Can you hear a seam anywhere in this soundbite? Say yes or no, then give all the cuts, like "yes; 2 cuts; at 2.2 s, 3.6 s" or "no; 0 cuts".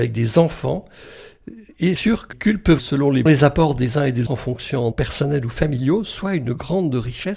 yes; 6 cuts; at 2.0 s, 2.3 s, 2.8 s, 3.3 s, 4.3 s, 4.9 s